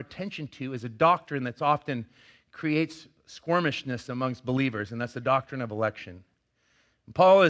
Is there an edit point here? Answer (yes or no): no